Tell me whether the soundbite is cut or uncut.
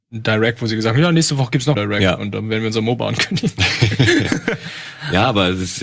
cut